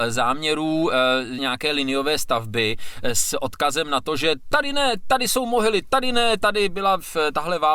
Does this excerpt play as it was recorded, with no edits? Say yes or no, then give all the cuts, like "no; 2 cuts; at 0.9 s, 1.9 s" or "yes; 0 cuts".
no; 1 cut; at 1.4 s